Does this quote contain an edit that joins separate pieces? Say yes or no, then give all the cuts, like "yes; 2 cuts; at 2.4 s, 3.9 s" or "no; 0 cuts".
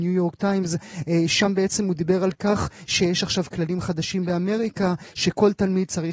no; 0 cuts